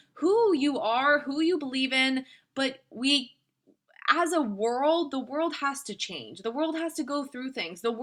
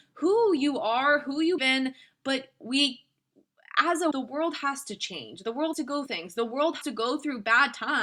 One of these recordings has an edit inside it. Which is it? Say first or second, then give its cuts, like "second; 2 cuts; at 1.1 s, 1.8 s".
second; 5 cuts; at 1.6 s, 4.1 s, 5.7 s, 6.1 s, 6.8 s